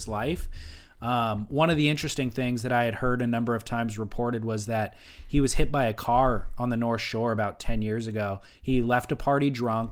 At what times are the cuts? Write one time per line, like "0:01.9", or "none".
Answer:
none